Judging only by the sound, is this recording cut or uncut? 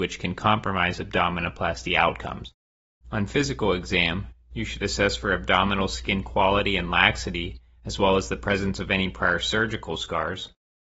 uncut